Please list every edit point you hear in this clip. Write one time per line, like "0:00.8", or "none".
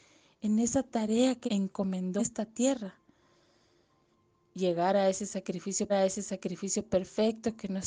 0:01.5
0:02.2
0:05.9